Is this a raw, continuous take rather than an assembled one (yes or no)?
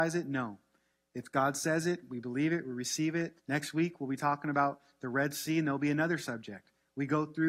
no